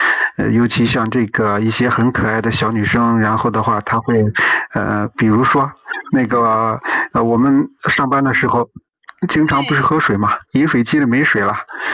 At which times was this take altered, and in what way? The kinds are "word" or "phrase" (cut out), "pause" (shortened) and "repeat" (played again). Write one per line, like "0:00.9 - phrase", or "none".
0:07.8 - pause